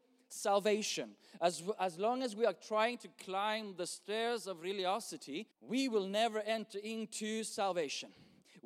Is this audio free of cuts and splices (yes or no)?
no